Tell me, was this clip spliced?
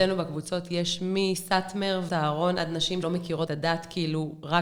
yes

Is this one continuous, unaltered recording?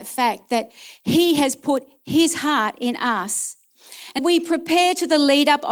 no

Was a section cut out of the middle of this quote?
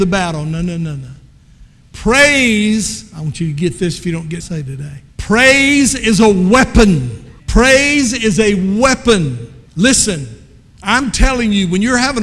yes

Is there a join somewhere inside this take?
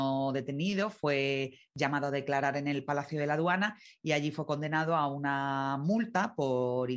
no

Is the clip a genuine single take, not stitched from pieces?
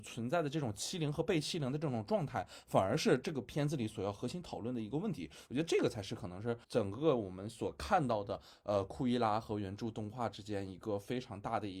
no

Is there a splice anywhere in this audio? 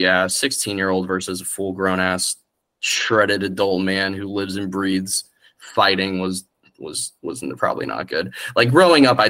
no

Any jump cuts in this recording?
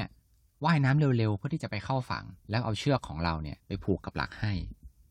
yes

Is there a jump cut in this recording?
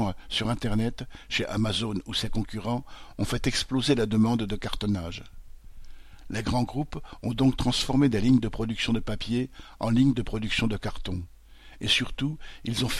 no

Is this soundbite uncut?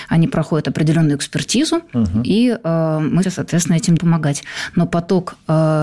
no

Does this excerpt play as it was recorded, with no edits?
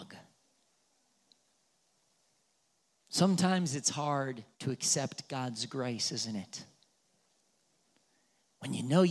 no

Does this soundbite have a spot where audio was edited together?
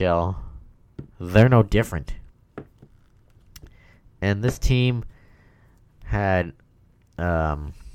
yes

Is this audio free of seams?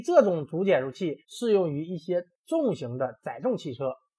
no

